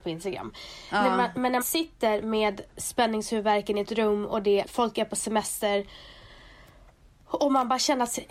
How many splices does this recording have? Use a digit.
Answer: 4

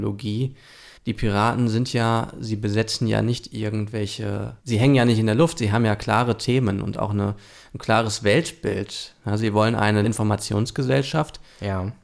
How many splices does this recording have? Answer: 3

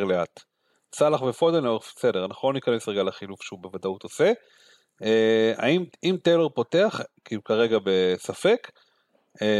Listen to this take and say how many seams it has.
1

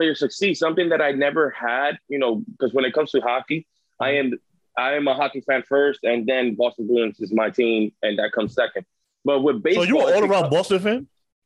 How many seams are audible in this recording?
0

